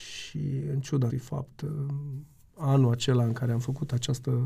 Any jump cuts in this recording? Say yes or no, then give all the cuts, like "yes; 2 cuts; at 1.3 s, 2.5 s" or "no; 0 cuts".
yes; 1 cut; at 1.1 s